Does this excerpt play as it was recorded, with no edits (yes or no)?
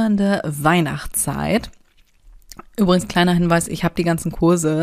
yes